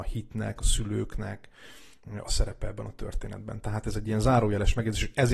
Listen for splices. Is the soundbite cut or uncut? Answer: uncut